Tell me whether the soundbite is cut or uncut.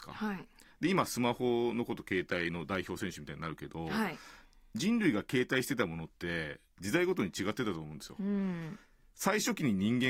uncut